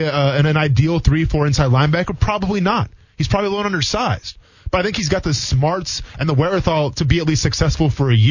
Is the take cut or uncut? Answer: uncut